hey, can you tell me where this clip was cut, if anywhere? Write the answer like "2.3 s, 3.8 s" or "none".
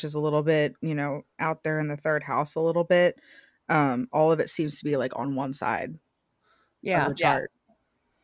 none

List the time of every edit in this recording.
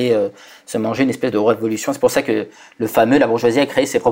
none

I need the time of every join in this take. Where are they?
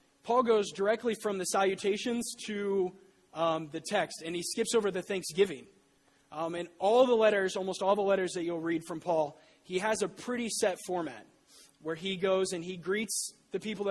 none

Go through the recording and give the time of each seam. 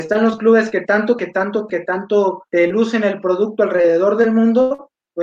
1.2 s, 1.7 s, 2.5 s

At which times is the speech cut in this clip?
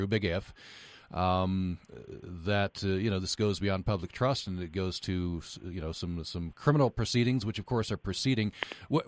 none

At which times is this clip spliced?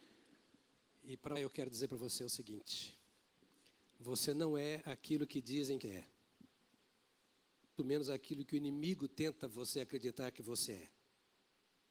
1.4 s, 5.8 s, 7.8 s

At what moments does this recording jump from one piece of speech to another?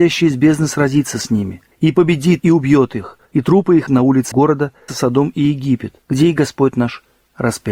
1.7 s, 2.4 s, 3.2 s, 3.9 s, 4.3 s, 4.9 s, 6.0 s

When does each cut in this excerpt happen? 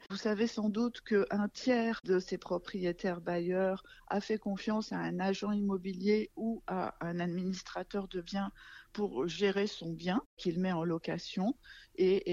none

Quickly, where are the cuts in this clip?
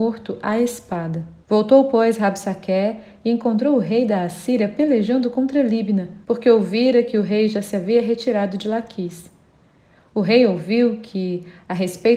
1.4 s, 6.2 s

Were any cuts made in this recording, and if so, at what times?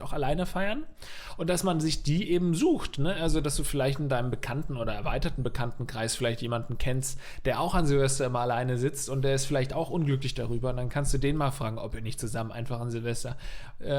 none

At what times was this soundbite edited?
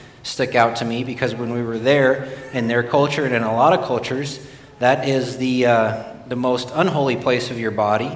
none

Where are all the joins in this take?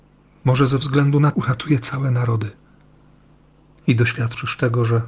1.3 s

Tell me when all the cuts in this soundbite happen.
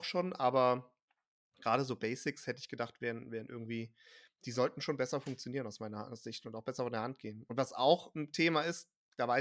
none

